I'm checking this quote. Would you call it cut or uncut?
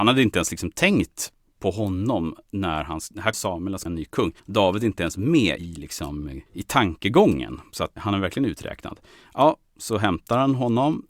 cut